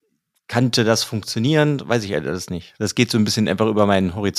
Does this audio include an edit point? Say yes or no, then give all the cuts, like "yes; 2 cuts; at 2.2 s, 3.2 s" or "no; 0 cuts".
no; 0 cuts